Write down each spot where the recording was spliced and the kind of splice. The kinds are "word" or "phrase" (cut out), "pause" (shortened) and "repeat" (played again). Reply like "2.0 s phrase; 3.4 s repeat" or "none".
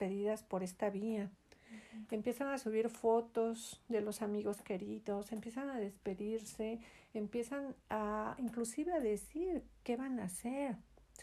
none